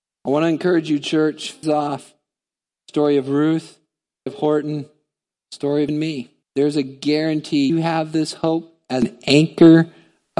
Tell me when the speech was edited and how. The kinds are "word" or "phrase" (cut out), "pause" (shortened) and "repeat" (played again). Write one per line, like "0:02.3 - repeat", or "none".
0:01.6 - phrase
0:04.3 - word
0:05.9 - word
0:06.4 - pause
0:07.7 - word